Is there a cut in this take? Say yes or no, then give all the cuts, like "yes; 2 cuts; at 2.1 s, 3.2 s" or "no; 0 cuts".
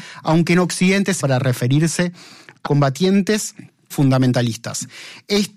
yes; 3 cuts; at 1.2 s, 2.7 s, 3.9 s